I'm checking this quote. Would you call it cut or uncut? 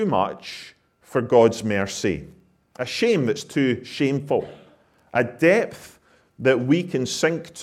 uncut